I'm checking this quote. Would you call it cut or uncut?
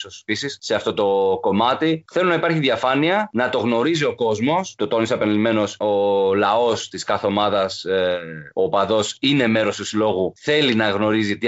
uncut